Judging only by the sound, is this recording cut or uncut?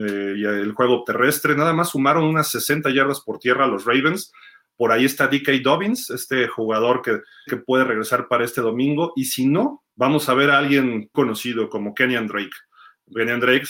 cut